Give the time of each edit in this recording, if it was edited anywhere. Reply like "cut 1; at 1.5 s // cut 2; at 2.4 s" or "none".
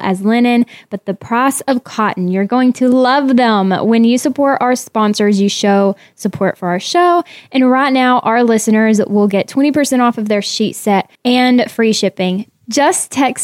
cut 1; at 11.1 s